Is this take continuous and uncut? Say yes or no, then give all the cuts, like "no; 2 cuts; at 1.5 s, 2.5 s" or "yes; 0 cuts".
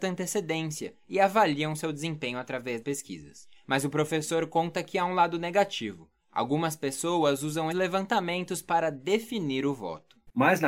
no; 2 cuts; at 2.8 s, 7.7 s